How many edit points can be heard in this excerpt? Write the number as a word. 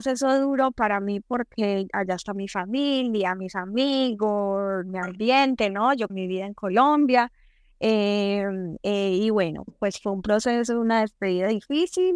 three